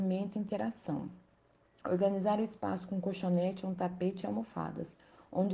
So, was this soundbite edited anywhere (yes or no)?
no